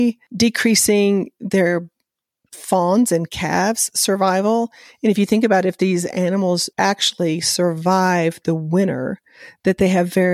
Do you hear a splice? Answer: yes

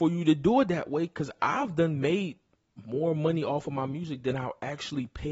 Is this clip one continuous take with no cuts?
yes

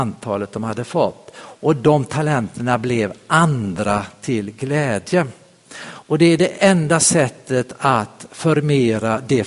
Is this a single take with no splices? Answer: yes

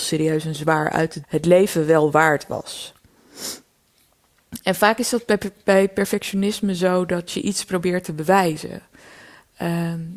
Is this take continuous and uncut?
no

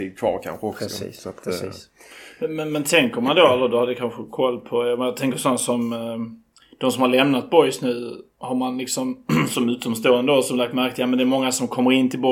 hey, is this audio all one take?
yes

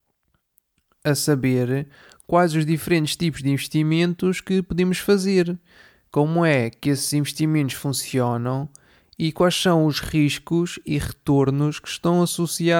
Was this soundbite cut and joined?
no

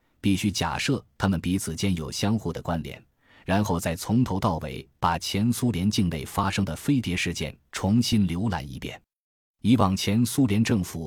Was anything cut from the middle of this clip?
no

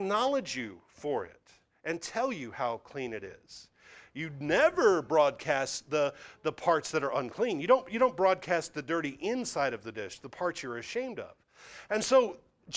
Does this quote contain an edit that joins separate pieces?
no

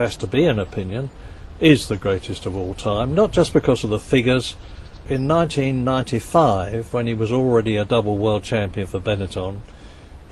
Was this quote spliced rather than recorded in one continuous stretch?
yes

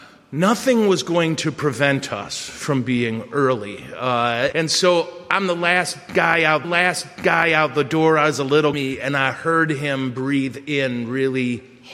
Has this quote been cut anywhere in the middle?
yes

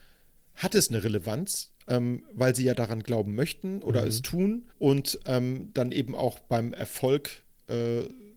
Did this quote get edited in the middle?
yes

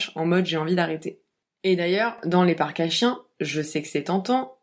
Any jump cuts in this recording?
no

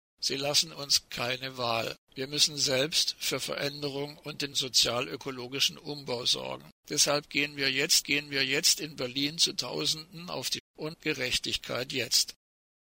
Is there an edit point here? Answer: yes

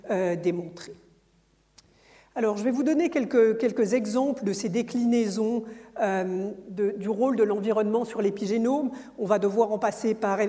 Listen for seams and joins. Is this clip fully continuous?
yes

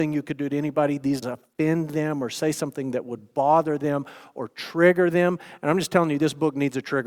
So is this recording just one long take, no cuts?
no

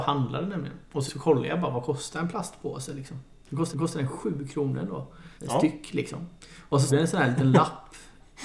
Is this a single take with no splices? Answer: no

